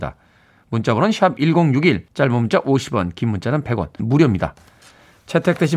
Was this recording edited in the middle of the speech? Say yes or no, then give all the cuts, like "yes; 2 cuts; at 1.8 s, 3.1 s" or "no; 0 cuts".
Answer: yes; 2 cuts; at 2.1 s, 4.0 s